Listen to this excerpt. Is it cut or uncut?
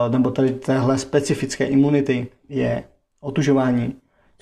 uncut